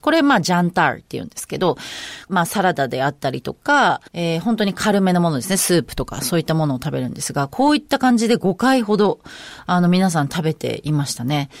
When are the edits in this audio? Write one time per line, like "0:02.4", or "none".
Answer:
0:02.3
0:04.1

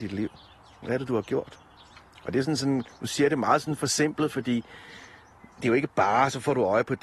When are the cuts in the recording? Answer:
0:05.5

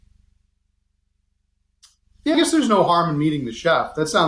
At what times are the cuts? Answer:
0:02.3

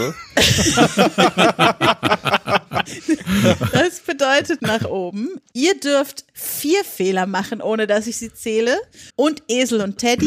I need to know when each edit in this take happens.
0:04.6
0:09.1

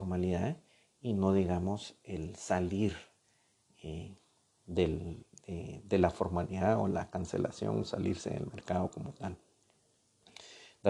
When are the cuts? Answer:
none

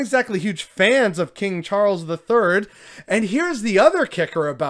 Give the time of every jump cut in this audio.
none

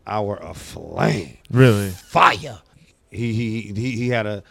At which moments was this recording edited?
0:01.4
0:02.7

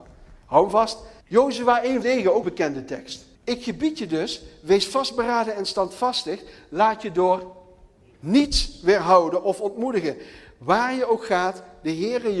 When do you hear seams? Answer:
0:01.2
0:02.0
0:02.4
0:03.3

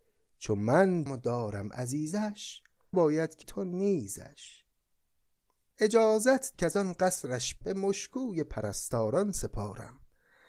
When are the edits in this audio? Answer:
0:01.1
0:02.9
0:03.4
0:06.5
0:07.6

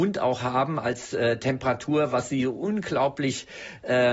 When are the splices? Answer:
none

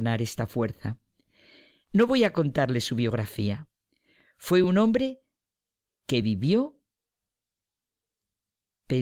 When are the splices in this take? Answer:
none

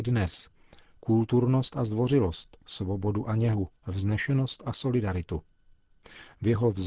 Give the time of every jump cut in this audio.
0:03.8

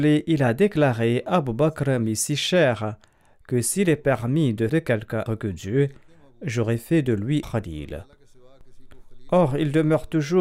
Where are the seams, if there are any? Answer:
0:04.7
0:05.3
0:07.4

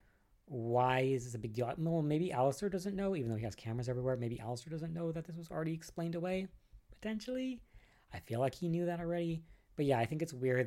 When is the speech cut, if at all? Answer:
none

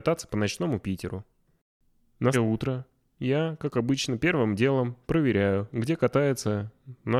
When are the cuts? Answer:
0:02.3

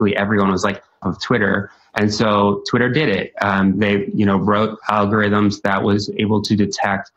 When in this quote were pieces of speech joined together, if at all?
0:01.0
0:04.8

